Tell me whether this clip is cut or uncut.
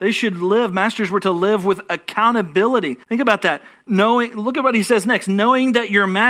cut